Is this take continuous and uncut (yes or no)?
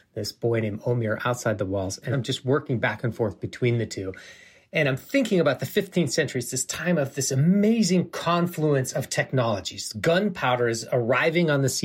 yes